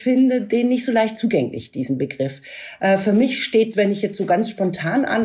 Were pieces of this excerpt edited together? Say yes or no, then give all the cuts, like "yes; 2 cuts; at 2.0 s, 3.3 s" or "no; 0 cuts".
yes; 1 cut; at 3.7 s